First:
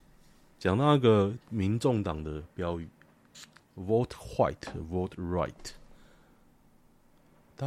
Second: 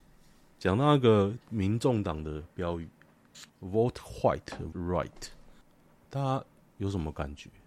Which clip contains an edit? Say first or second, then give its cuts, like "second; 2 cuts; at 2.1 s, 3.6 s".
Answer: second; 3 cuts; at 3.5 s, 4.7 s, 5.6 s